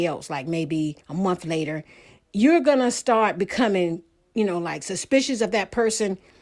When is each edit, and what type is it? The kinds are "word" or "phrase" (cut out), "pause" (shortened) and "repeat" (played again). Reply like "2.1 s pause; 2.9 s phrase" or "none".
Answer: 1.0 s pause